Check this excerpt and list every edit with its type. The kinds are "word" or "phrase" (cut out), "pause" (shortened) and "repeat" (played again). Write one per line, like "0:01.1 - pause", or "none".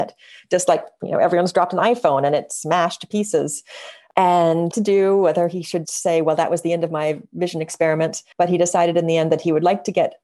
0:04.7 - phrase
0:05.8 - word
0:08.3 - pause